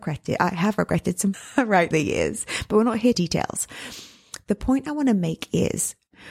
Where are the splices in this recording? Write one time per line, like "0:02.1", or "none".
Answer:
0:01.3
0:01.9
0:03.1